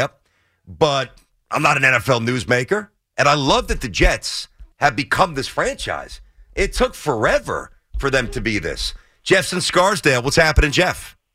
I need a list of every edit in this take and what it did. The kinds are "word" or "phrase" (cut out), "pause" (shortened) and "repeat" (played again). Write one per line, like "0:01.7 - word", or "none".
0:04.7 - pause